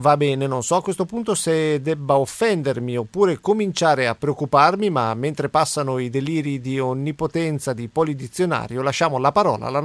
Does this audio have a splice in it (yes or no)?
no